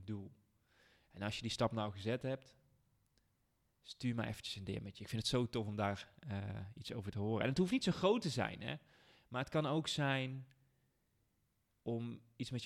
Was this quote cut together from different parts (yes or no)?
no